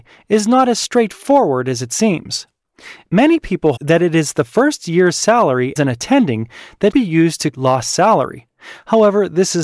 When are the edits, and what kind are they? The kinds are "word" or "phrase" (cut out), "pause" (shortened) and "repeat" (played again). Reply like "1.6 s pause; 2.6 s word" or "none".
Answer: 3.8 s word; 5.8 s word; 6.9 s word; 7.5 s word